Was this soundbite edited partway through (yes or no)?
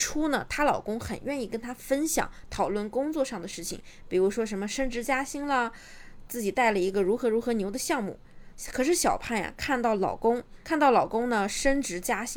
yes